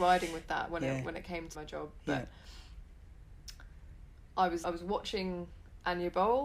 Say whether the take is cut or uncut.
cut